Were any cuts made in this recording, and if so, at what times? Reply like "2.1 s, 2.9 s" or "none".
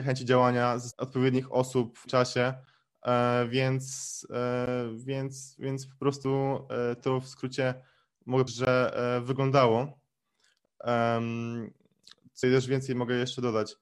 0.9 s, 2.1 s, 5.6 s, 7.0 s, 8.5 s, 12.4 s